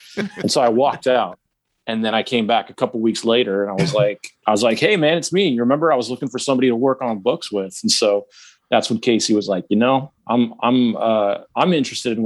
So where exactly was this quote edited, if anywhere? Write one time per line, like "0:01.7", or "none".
0:10.2